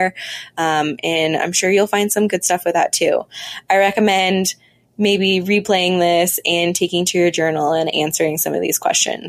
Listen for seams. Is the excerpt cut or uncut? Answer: uncut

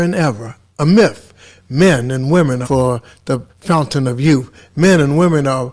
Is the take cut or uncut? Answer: cut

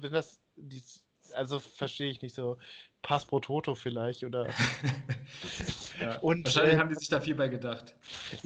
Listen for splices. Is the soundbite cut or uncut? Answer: uncut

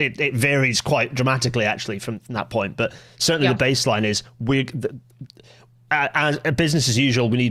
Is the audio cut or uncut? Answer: uncut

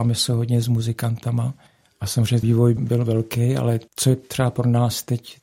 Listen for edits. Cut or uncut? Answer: cut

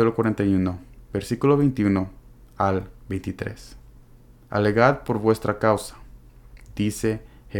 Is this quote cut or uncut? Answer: uncut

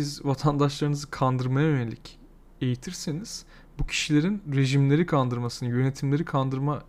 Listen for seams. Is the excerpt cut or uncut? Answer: uncut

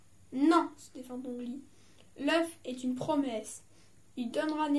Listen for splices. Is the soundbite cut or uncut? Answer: uncut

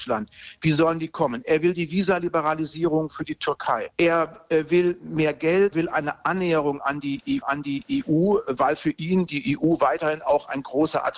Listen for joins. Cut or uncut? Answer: cut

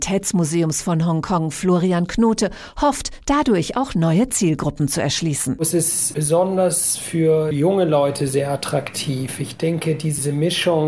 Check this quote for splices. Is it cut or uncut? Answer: uncut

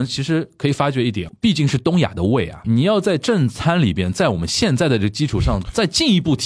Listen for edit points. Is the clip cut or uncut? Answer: cut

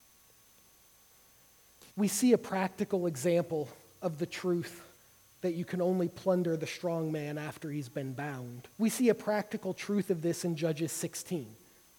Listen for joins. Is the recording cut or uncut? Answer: cut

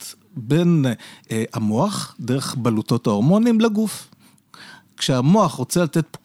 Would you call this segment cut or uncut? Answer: uncut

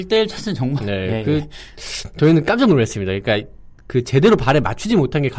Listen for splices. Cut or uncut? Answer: uncut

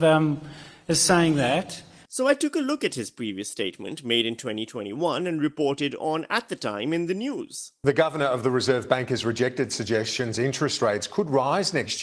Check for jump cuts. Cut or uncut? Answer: uncut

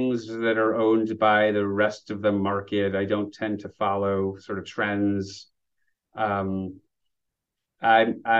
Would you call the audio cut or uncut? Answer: uncut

